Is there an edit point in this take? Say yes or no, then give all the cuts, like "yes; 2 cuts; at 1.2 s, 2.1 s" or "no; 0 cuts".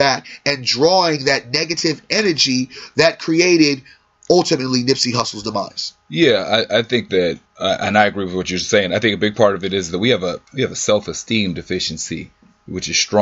yes; 2 cuts; at 7.5 s, 10.5 s